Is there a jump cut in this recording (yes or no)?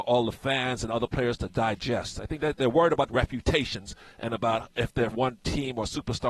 yes